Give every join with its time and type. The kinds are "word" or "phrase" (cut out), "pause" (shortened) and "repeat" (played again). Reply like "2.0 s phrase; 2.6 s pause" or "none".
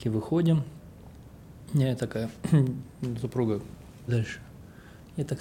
4.1 s phrase